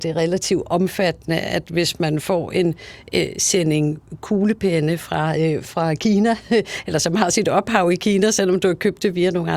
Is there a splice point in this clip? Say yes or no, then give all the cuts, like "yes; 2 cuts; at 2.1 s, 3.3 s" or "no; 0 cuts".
yes; 1 cut; at 5.6 s